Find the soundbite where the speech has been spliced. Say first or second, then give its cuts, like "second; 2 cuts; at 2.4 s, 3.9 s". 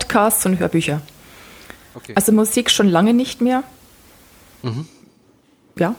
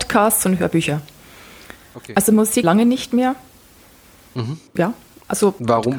second; 2 cuts; at 2.6 s, 4.7 s